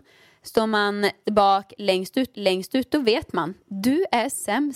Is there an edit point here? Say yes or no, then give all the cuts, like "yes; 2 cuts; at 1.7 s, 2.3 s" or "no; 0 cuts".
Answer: yes; 2 cuts; at 1.2 s, 2.3 s